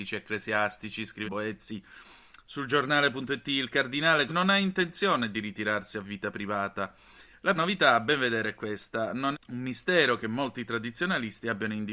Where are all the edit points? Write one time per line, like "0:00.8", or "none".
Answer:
0:01.2
0:04.3
0:07.5
0:09.3